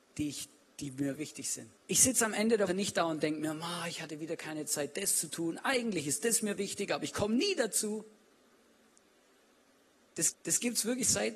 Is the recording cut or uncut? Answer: cut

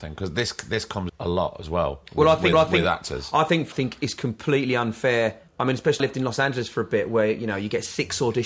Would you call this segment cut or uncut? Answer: cut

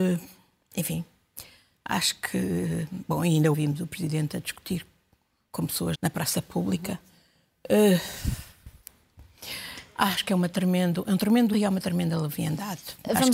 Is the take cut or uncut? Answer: cut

